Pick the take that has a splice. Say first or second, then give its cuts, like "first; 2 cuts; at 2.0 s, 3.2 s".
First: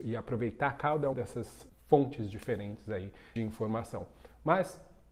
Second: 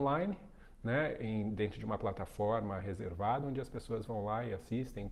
first; 3 cuts; at 1.1 s, 1.7 s, 3.4 s